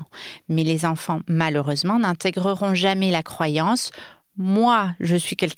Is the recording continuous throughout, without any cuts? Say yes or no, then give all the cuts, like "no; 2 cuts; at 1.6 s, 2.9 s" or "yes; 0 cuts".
yes; 0 cuts